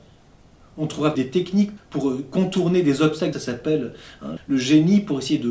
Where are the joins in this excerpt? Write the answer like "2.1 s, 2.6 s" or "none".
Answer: 1.1 s, 1.8 s, 3.3 s, 4.4 s